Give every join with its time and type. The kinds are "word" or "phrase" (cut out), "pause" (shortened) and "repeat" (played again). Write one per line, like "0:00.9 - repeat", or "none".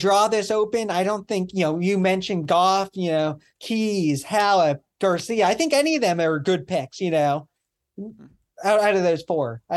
none